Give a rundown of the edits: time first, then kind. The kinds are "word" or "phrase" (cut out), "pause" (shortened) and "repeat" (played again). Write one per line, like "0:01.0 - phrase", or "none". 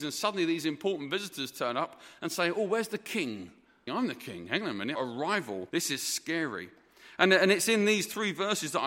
0:03.9 - phrase
0:05.0 - phrase
0:05.7 - pause